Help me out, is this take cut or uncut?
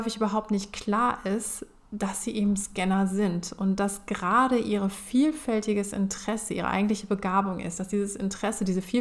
uncut